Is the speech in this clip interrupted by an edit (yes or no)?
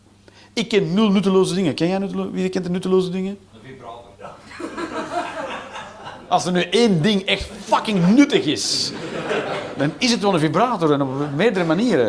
yes